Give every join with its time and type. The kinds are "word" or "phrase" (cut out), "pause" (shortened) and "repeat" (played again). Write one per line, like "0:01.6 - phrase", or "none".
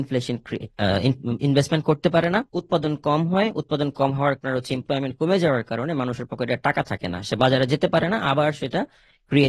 0:02.5 - pause
0:04.4 - word
0:04.8 - phrase